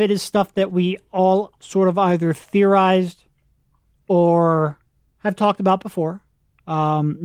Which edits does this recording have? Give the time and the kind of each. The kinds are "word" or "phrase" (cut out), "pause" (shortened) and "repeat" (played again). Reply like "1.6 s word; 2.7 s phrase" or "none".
none